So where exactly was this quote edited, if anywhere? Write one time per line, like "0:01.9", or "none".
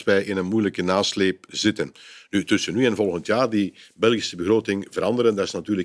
0:01.5